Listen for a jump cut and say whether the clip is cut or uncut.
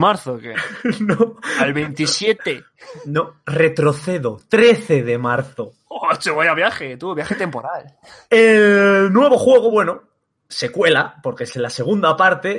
uncut